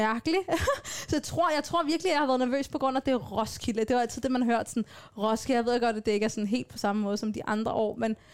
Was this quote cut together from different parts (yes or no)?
no